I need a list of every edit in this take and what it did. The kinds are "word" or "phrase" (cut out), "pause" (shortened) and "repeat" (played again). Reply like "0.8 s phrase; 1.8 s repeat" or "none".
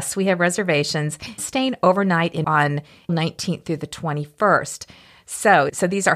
1.4 s word; 2.4 s word; 3.1 s word